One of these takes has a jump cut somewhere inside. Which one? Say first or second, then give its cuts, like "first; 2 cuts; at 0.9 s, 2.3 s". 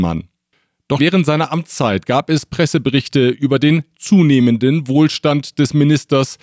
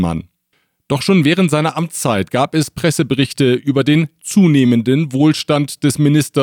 first; 1 cut; at 1.0 s